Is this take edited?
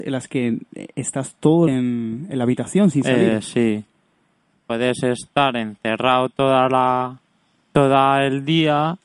yes; 1 cut; at 1.7 s

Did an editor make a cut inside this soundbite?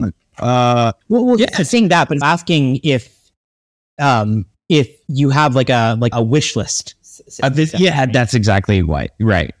yes; 3 cuts; at 1.0 s, 2.2 s, 6.1 s

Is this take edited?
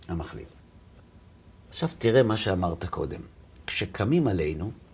no; 0 cuts

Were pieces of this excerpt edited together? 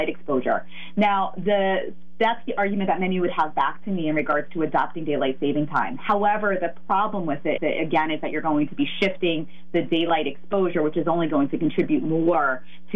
yes; 1 cut; at 7.6 s

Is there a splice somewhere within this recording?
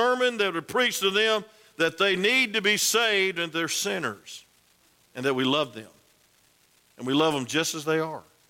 no; 0 cuts

